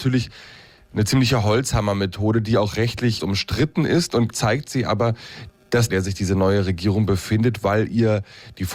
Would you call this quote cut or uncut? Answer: cut